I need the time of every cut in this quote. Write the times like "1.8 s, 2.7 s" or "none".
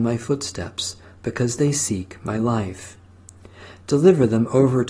none